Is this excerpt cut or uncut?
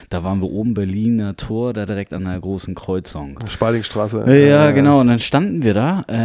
uncut